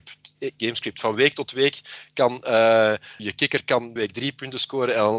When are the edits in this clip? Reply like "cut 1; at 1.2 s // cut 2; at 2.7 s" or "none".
cut 1; at 3.2 s // cut 2; at 4.0 s